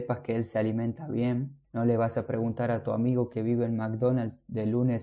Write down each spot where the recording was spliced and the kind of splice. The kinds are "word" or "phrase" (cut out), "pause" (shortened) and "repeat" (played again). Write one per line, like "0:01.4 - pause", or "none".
0:01.6 - pause